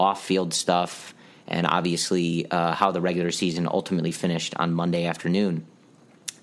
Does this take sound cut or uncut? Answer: uncut